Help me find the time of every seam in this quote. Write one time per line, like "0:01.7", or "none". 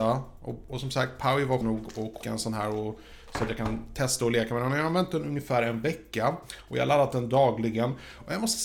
0:01.6
0:02.2